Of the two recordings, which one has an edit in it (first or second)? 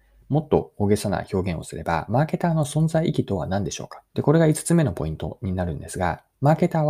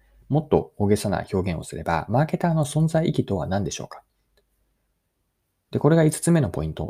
first